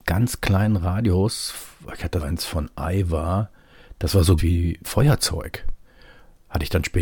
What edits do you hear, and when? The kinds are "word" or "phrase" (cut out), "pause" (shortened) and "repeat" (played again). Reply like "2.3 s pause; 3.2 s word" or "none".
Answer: 2.2 s word; 4.4 s word; 4.8 s word